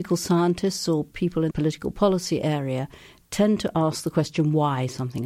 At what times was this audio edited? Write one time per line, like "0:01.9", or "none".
0:01.5